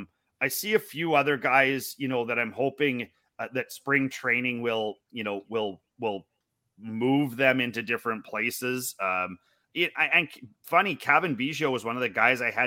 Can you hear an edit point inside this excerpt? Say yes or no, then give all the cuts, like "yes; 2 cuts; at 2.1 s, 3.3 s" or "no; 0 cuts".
no; 0 cuts